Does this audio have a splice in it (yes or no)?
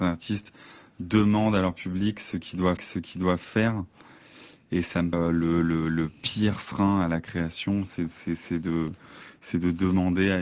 yes